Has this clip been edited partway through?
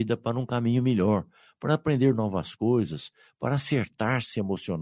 no; 0 cuts

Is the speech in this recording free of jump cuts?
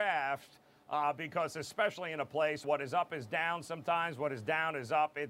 no; 1 cut; at 2.6 s

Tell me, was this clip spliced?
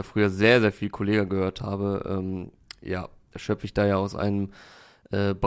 no; 0 cuts

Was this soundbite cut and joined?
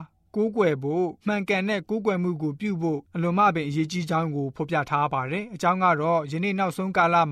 yes; 1 cut; at 1.2 s

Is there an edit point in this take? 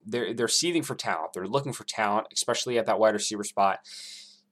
no; 0 cuts

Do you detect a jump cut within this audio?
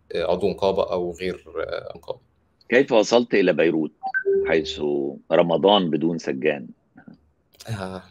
yes; 2 cuts; at 1.9 s, 5.2 s

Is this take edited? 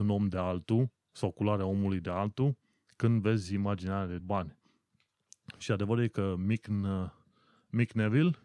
yes; 1 cut; at 4.2 s

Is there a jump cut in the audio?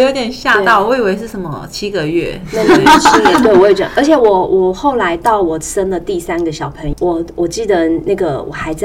yes; 1 cut; at 6.9 s

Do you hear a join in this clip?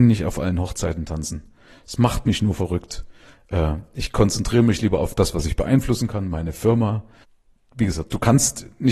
no; 0 cuts

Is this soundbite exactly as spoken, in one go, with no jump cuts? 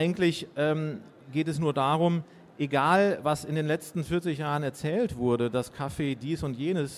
yes; 0 cuts

